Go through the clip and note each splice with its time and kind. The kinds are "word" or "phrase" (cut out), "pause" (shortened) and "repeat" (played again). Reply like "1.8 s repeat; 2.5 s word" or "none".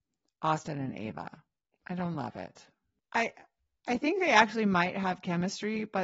none